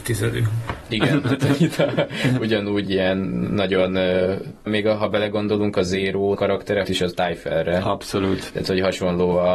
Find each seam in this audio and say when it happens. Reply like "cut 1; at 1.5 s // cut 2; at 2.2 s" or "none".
cut 1; at 2.9 s // cut 2; at 4.7 s // cut 3; at 6.4 s // cut 4; at 6.8 s